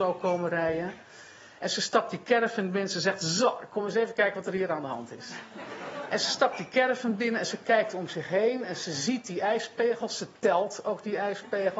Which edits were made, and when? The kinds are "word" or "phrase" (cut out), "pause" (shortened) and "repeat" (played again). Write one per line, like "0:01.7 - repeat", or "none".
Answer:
none